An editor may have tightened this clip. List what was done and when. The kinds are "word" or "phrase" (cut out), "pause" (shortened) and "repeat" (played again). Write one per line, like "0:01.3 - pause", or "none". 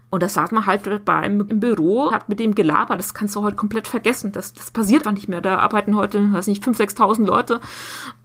0:01.5 - phrase
0:02.1 - word
0:05.0 - word